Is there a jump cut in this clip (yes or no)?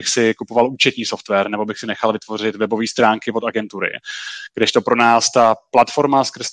no